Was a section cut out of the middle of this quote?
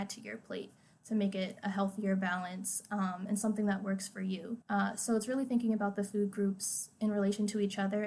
no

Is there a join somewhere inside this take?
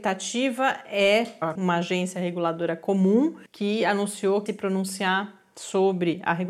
yes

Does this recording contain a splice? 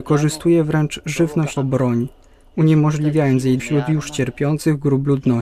yes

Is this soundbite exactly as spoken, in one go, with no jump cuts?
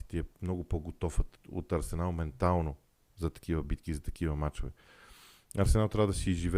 yes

